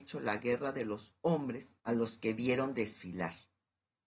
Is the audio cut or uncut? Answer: cut